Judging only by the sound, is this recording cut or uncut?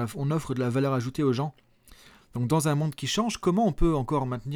uncut